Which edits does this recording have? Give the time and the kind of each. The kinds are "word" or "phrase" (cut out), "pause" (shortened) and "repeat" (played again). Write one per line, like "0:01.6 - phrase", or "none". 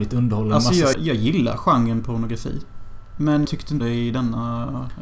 0:00.9 - word
0:03.5 - word
0:03.8 - word